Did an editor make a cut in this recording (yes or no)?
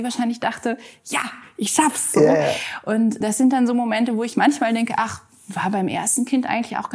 yes